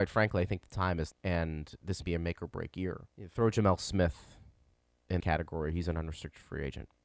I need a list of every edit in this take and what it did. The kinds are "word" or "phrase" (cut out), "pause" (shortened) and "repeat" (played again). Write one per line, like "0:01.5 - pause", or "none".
0:01.1 - word
0:02.0 - word
0:03.1 - pause
0:05.2 - word